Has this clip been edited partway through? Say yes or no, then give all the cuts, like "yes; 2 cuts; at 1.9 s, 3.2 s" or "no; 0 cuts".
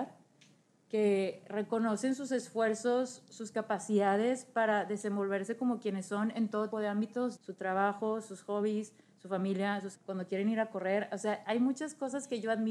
yes; 3 cuts; at 6.7 s, 7.4 s, 9.9 s